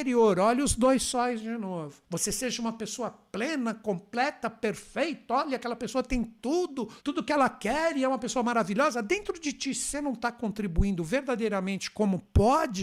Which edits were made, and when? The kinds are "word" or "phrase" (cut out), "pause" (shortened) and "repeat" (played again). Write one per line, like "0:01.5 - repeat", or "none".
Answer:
0:02.0 - pause
0:07.0 - pause